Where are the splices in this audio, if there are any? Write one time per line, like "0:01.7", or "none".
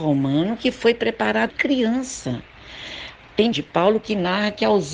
0:01.5
0:03.5